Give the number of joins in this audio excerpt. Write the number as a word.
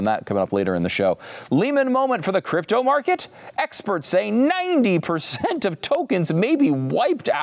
zero